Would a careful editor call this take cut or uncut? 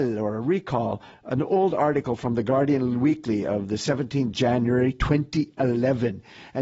uncut